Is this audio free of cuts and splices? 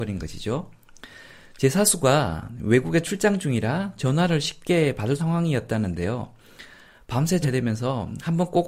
no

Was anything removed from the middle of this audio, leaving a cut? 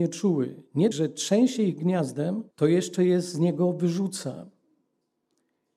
yes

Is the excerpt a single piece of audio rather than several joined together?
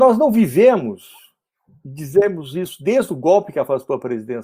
yes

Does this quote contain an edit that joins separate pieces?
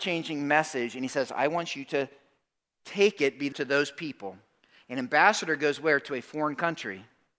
yes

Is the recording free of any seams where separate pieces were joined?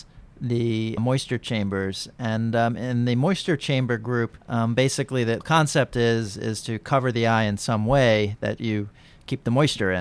no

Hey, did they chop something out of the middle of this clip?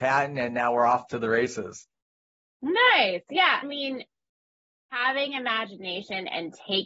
yes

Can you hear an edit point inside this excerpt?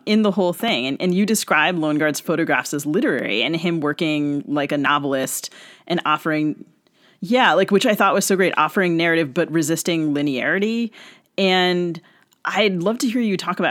no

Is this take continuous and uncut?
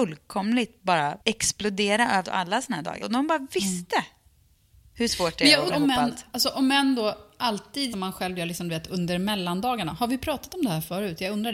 no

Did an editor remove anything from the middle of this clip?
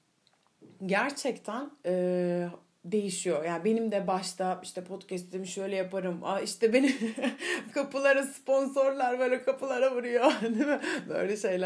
no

